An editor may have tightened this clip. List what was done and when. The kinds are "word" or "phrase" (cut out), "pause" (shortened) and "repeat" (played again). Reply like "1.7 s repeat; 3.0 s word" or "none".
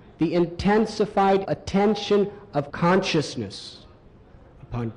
1.4 s word; 2.7 s word